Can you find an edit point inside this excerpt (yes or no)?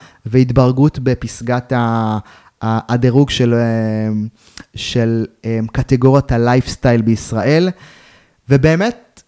no